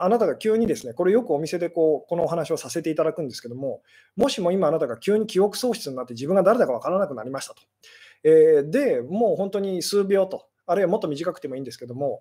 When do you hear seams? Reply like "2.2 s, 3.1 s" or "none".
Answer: none